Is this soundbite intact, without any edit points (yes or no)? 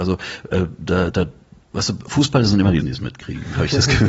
no